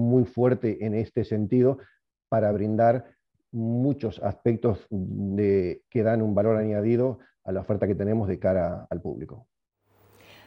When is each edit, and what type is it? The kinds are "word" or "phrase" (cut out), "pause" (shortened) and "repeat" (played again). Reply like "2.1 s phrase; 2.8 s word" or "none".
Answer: none

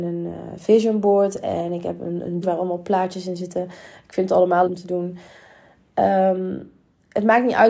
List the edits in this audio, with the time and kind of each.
2.4 s word; 4.6 s word

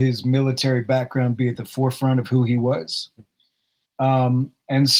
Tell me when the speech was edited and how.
none

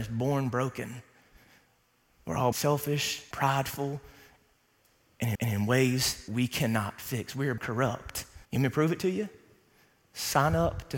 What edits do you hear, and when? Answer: 2.5 s word; 3.3 s word; 5.4 s repeat; 6.3 s word; 7.6 s word; 8.4 s pause

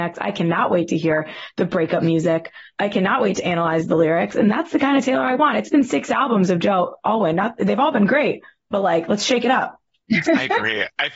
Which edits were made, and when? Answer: none

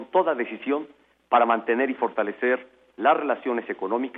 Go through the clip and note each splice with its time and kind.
none

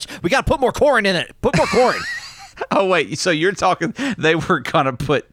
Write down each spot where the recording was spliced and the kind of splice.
none

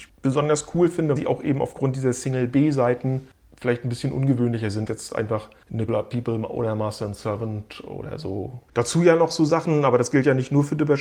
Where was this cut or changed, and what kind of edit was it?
1.2 s word; 4.9 s word; 5.9 s word

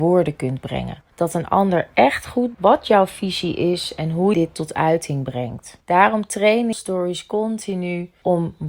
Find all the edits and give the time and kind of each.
2.5 s word; 4.3 s word; 5.8 s pause; 6.7 s phrase

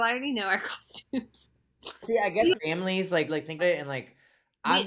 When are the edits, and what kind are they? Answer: 2.0 s word; 2.6 s word; 3.3 s word; 3.6 s word

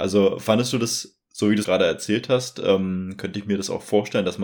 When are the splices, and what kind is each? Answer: 1.6 s phrase

